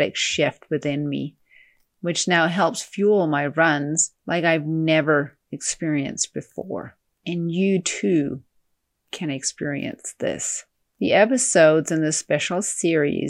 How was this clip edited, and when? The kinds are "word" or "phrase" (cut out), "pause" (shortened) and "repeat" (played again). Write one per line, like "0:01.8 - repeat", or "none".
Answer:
0:04.2 - pause
0:05.4 - pause